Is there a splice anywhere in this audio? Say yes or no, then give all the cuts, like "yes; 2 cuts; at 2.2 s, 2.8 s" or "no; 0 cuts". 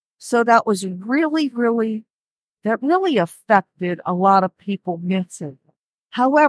no; 0 cuts